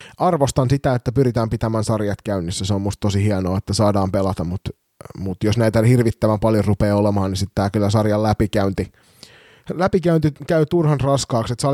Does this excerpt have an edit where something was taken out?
no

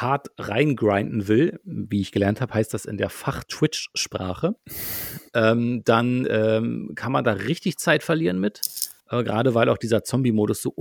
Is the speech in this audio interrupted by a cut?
yes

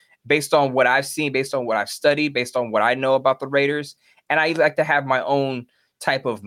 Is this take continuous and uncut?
yes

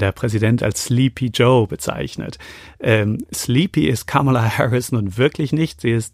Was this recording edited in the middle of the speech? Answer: no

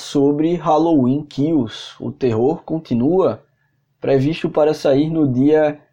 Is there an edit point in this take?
no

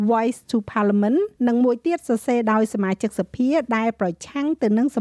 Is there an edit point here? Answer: yes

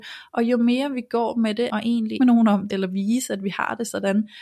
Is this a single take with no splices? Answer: no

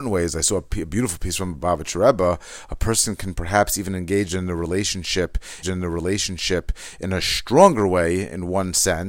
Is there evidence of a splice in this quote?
yes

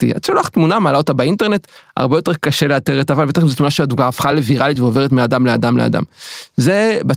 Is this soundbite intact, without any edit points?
yes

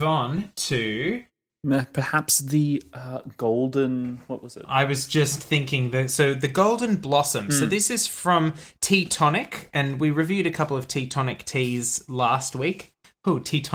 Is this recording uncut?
yes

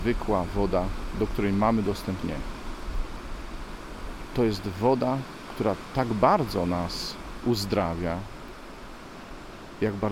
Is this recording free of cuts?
no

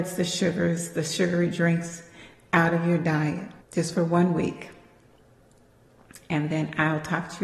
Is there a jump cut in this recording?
yes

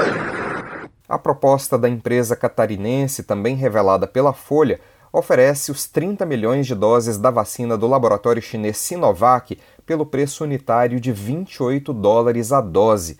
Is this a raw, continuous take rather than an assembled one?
yes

